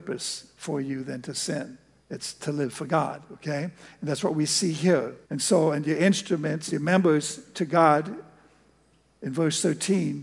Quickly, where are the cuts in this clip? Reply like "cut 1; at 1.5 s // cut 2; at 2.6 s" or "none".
cut 1; at 2.0 s // cut 2; at 5.2 s